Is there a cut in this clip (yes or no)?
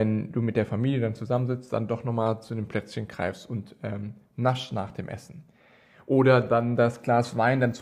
no